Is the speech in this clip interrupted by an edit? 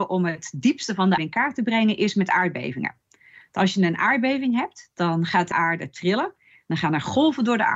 yes; 2 cuts; at 1.2 s, 5.5 s

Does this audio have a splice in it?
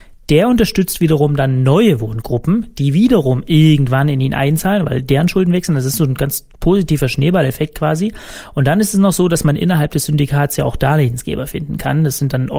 no; 0 cuts

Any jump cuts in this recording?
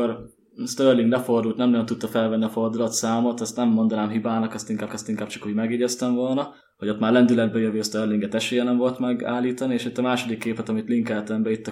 yes; 2 cuts; at 4.9 s, 6.6 s

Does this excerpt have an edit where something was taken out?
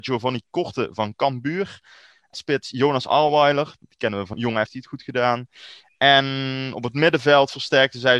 yes; 2 cuts; at 2.3 s, 4.7 s

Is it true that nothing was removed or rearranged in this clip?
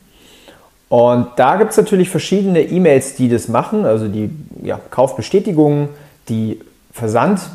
yes; 0 cuts

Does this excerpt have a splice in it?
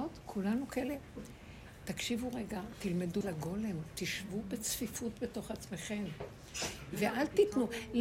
yes; 1 cut; at 3.2 s

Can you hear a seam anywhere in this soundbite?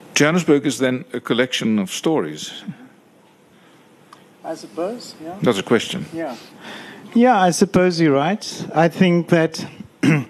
no; 0 cuts

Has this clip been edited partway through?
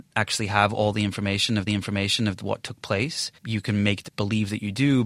yes; 3 cuts; at 1.7 s, 3.4 s, 4.1 s

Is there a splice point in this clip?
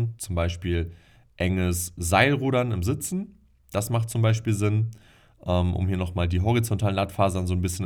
no; 0 cuts

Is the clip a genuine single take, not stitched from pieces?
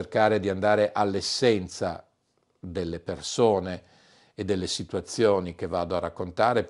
yes; 0 cuts

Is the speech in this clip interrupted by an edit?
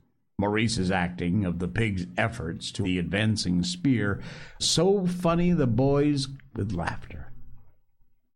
yes; 3 cuts; at 2.8 s, 4.6 s, 6.5 s

